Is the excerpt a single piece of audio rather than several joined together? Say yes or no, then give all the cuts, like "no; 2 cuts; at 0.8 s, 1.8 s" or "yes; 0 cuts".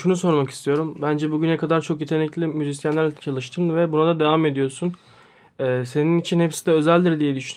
yes; 0 cuts